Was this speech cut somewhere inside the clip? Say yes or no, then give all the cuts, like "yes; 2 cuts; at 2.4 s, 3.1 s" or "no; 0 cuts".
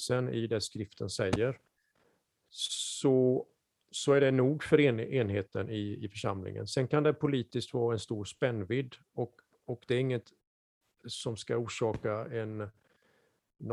no; 0 cuts